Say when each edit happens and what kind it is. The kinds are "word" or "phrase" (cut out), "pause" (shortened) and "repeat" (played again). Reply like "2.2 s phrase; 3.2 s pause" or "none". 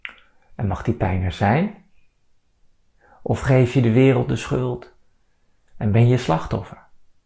none